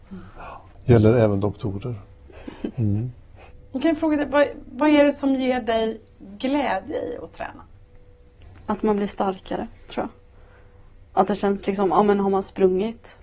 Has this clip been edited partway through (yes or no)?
no